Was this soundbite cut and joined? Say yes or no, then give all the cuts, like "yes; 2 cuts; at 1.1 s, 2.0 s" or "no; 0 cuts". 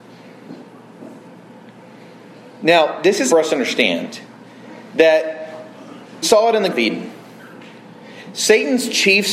yes; 3 cuts; at 3.3 s, 6.2 s, 6.7 s